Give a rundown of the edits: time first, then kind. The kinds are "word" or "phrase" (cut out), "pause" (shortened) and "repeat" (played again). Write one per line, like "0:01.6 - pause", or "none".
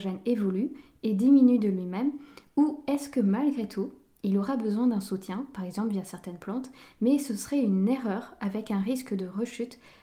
none